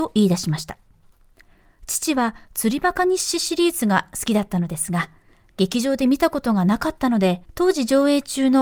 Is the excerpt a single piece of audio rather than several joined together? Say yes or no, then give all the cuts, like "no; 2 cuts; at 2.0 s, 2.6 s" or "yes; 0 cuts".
no; 1 cut; at 7.4 s